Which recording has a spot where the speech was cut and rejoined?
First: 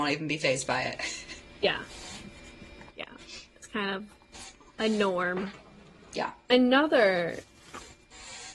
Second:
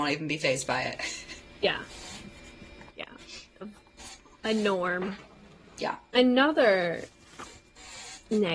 second; 1 cut; at 3.6 s

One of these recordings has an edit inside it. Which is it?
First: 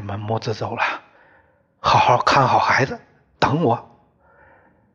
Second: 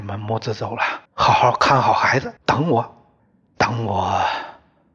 second; 3 cuts; at 1.1 s, 2.4 s, 3.2 s

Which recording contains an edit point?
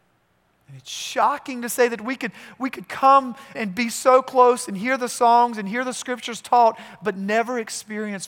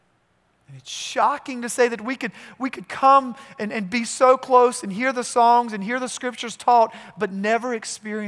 first; 1 cut; at 3.5 s

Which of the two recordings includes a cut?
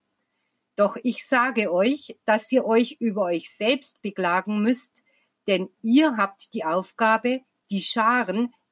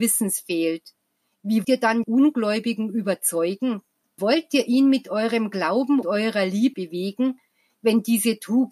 second; 5 cuts; at 1.6 s, 2.0 s, 4.2 s, 6.0 s, 6.7 s

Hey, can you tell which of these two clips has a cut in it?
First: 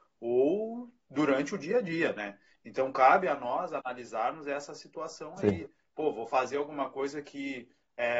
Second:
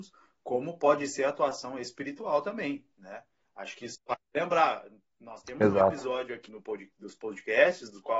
second; 1 cut; at 6.5 s

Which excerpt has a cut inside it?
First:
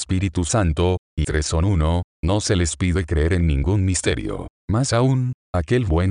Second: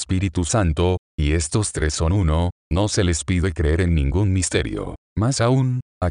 first; 1 cut; at 1.2 s

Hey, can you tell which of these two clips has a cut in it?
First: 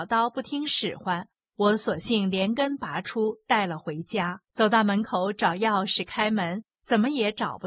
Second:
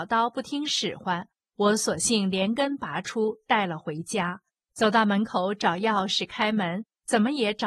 first; 1 cut; at 4.4 s

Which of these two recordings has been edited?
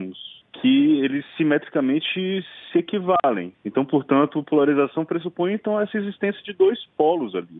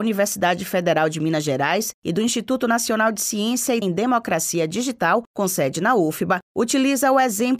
second; 1 cut; at 3.8 s

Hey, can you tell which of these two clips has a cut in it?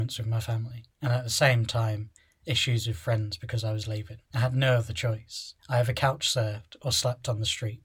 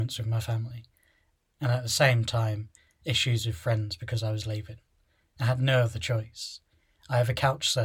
first; 3 cuts; at 0.9 s, 4.3 s, 5.6 s

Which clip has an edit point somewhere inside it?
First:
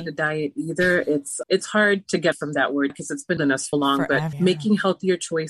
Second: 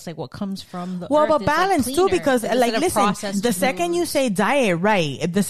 first; 6 cuts; at 1.4 s, 2.3 s, 2.9 s, 3.4 s, 3.7 s, 4.3 s

